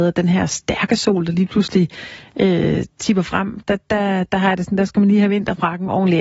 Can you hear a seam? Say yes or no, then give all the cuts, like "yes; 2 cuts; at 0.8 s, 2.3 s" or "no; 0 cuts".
no; 0 cuts